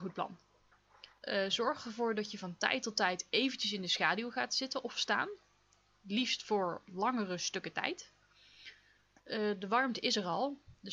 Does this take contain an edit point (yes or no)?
yes